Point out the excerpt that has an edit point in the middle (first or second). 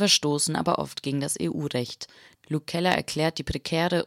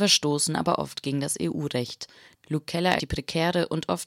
second